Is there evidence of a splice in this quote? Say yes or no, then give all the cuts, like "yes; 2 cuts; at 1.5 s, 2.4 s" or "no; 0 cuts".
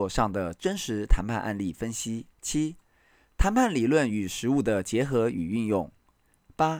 yes; 1 cut; at 2.3 s